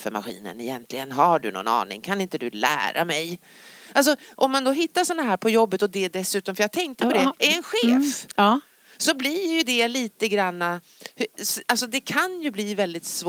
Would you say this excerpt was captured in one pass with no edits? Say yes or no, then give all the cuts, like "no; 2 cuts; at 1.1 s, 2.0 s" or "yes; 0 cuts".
yes; 0 cuts